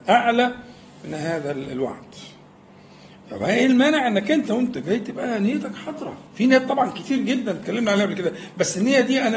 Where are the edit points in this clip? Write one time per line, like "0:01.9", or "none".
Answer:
0:06.3